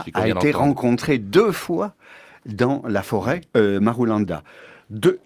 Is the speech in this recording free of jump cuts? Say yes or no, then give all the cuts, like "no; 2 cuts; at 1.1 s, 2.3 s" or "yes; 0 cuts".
no; 1 cut; at 3.5 s